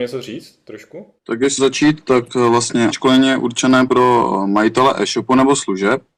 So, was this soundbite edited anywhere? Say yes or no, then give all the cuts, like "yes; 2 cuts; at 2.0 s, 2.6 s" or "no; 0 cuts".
yes; 4 cuts; at 1.2 s, 1.6 s, 2.9 s, 3.9 s